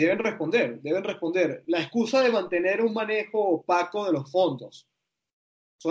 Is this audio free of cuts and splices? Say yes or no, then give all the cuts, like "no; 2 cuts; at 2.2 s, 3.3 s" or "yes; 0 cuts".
yes; 0 cuts